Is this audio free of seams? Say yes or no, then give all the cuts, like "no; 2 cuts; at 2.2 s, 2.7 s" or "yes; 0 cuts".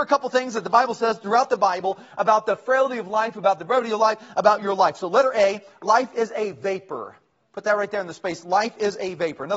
yes; 0 cuts